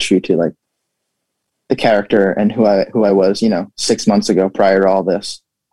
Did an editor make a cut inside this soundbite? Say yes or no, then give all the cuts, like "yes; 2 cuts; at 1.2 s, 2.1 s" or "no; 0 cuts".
no; 0 cuts